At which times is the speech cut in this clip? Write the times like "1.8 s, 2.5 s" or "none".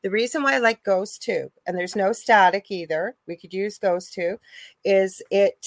none